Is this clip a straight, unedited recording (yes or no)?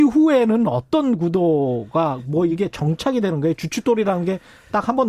yes